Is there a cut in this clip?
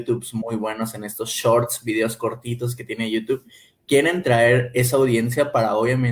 no; 0 cuts

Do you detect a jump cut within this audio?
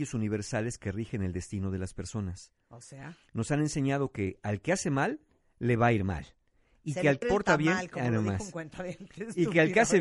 yes; 1 cut; at 7.2 s

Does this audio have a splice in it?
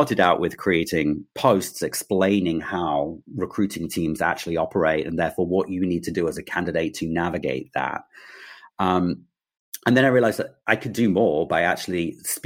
yes; 3 cuts; at 1.3 s, 3.3 s, 10.6 s

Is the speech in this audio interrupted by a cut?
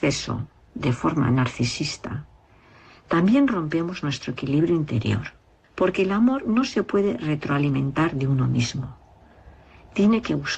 no; 0 cuts

